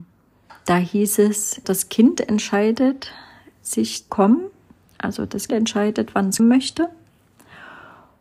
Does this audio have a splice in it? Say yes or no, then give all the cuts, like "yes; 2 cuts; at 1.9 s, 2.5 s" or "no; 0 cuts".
yes; 4 cuts; at 1.6 s, 4.1 s, 5.5 s, 6.4 s